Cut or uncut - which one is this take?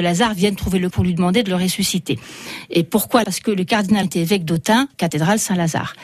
cut